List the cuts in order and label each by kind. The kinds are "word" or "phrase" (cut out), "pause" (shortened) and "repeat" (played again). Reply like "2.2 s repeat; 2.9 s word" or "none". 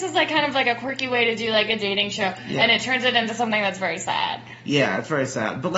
none

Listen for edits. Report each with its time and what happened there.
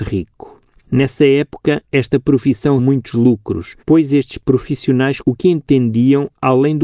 2.8 s word; 3.8 s pause; 5.2 s phrase

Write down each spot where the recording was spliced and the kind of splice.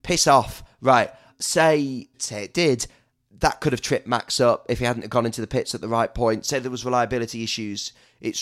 none

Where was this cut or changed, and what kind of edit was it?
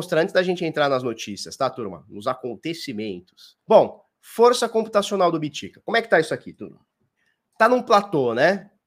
3.6 s pause; 7.2 s pause

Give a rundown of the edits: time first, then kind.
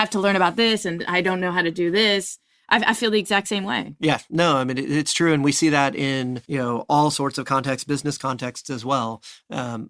6.4 s pause

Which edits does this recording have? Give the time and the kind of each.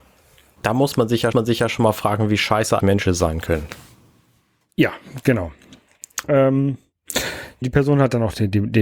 1.3 s repeat; 2.8 s word; 7.6 s word

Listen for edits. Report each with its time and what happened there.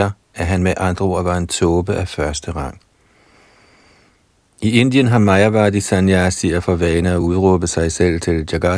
none

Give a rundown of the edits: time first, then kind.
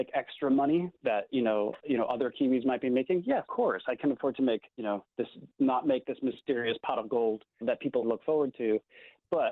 1.8 s word; 3.5 s word; 4.7 s pause; 7.6 s word; 8.0 s word

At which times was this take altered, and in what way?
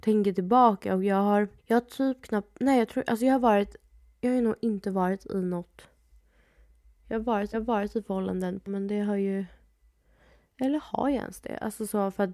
1.6 s pause; 7.5 s repeat; 8.7 s phrase

